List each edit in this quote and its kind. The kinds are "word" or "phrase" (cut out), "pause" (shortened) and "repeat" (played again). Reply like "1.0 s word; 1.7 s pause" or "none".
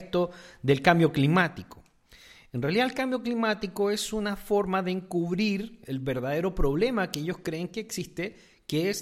none